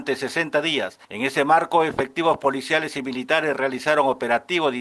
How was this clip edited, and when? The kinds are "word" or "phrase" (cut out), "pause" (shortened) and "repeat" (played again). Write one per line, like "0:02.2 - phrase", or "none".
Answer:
0:01.0 - pause